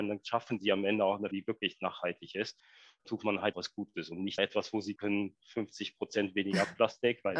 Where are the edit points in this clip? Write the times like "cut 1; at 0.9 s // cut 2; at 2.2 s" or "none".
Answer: cut 1; at 1.3 s // cut 2; at 3.0 s // cut 3; at 3.5 s // cut 4; at 4.4 s // cut 5; at 5.0 s

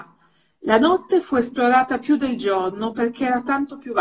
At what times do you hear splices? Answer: none

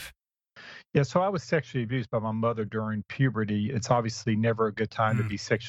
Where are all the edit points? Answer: none

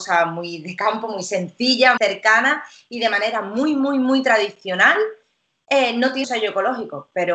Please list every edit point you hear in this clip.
cut 1; at 2.0 s // cut 2; at 6.2 s

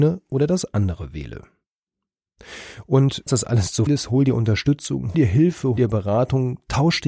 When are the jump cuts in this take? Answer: cut 1; at 3.3 s // cut 2; at 3.9 s // cut 3; at 5.1 s // cut 4; at 5.8 s

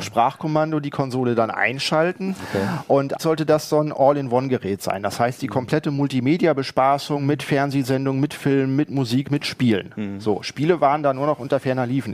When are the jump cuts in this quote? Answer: cut 1; at 3.2 s

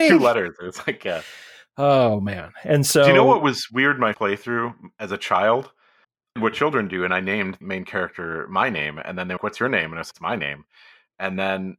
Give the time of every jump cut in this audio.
cut 1; at 4.1 s // cut 2; at 6.0 s // cut 3; at 6.4 s // cut 4; at 7.6 s // cut 5; at 9.4 s // cut 6; at 10.1 s

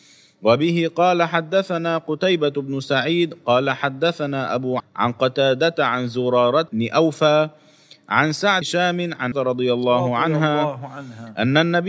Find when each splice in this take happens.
cut 1; at 4.8 s // cut 2; at 6.7 s // cut 3; at 8.6 s // cut 4; at 9.3 s

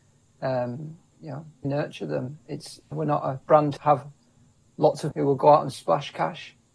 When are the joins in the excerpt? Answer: cut 1; at 1.6 s // cut 2; at 2.9 s // cut 3; at 3.8 s // cut 4; at 5.1 s

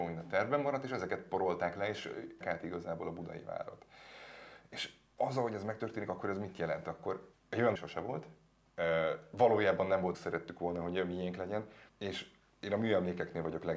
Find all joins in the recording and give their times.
cut 1; at 2.4 s // cut 2; at 7.3 s // cut 3; at 7.8 s // cut 4; at 10.1 s // cut 5; at 11.9 s

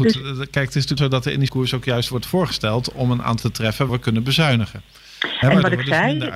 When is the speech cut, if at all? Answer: cut 1; at 1.0 s // cut 2; at 1.5 s // cut 3; at 3.4 s // cut 4; at 3.9 s

